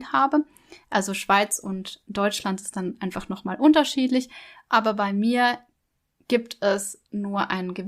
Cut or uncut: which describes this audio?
uncut